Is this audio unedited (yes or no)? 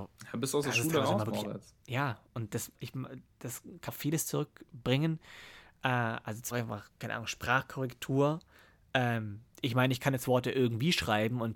no